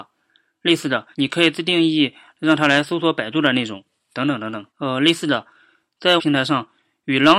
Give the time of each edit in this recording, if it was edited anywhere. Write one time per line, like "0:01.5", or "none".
0:01.1
0:04.7
0:06.2